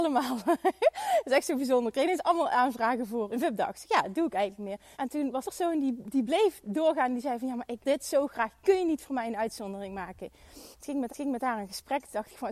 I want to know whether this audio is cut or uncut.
cut